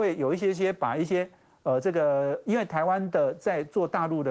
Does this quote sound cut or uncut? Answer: uncut